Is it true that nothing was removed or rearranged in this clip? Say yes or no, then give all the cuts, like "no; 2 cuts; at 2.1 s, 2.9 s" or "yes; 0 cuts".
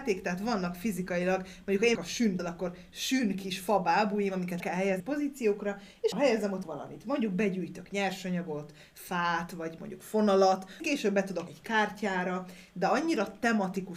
no; 9 cuts; at 1.9 s, 2.4 s, 4.6 s, 5.0 s, 6.1 s, 6.6 s, 9.8 s, 10.8 s, 11.5 s